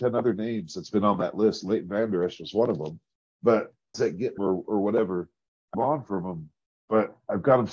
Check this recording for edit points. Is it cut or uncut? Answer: cut